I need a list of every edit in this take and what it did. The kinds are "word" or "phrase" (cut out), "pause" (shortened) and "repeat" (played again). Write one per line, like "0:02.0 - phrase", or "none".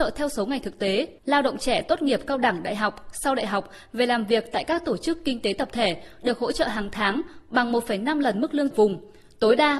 0:01.2 - pause
0:08.7 - phrase